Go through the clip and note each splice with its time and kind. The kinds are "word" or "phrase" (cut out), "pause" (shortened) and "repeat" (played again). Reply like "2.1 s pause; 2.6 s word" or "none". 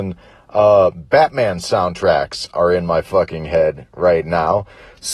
none